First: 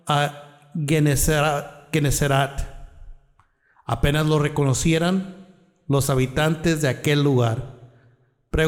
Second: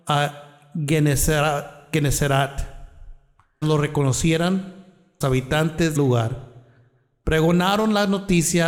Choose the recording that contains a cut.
second; 3 cuts; at 3.6 s, 5.2 s, 6.0 s

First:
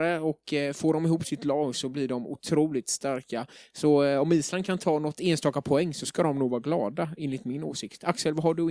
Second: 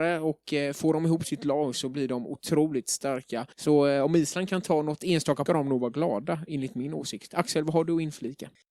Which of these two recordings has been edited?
second; 2 cuts; at 3.5 s, 5.5 s

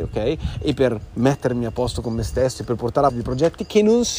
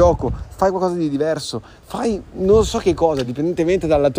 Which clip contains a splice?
first; 1 cut; at 3.1 s

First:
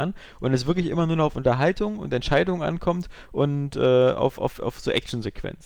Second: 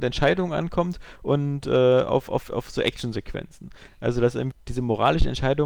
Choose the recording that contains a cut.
second; 1 cut; at 4.5 s

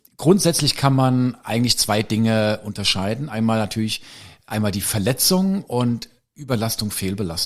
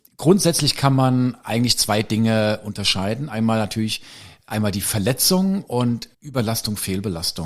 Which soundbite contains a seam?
second; 1 cut; at 6.1 s

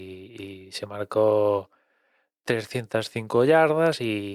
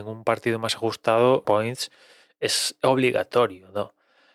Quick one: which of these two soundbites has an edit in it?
second; 1 cut; at 1.4 s

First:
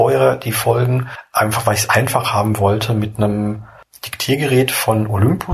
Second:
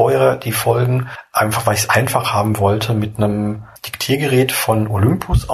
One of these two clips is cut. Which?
second; 1 cut; at 3.8 s

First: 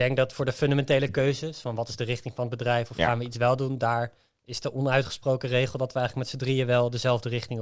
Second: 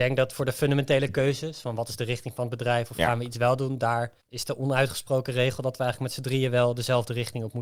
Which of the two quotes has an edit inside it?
second; 1 cut; at 4.2 s

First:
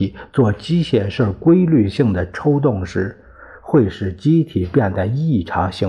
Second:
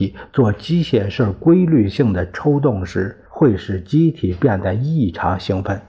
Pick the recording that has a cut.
second; 1 cut; at 3.3 s

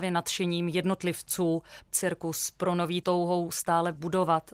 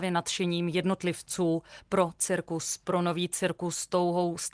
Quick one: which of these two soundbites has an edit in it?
first; 2 cuts; at 1.9 s, 3.0 s

